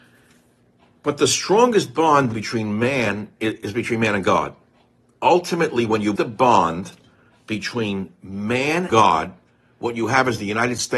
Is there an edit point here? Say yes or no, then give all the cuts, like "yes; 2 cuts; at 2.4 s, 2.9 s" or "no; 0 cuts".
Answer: yes; 4 cuts; at 2.3 s, 3.3 s, 6.2 s, 8.9 s